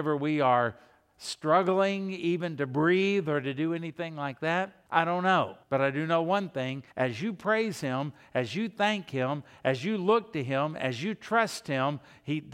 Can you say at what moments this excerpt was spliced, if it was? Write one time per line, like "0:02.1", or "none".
0:04.9
0:05.6
0:06.9